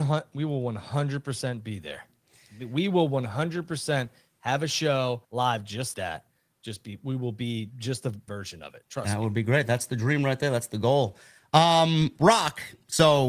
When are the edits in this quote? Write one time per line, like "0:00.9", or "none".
0:05.2
0:05.9
0:08.3